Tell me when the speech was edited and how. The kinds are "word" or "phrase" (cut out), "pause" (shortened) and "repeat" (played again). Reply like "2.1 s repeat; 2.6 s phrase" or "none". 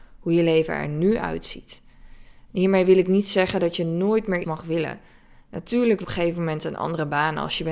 4.4 s word; 6.0 s phrase